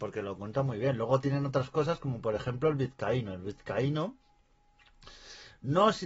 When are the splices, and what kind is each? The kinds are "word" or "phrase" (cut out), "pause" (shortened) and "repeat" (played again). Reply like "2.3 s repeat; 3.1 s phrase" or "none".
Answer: none